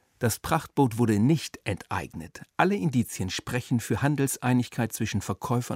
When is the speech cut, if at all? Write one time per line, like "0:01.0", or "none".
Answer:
none